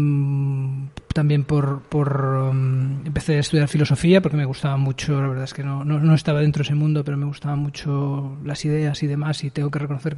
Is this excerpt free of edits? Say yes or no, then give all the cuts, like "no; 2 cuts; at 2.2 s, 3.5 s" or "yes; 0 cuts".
yes; 0 cuts